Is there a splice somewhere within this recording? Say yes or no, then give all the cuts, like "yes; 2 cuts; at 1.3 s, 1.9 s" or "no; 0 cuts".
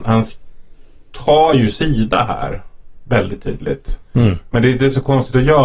no; 0 cuts